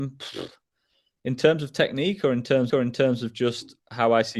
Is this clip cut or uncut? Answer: cut